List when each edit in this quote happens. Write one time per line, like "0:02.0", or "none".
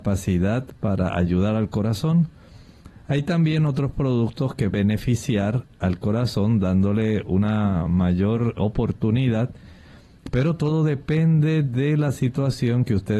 0:04.7
0:08.6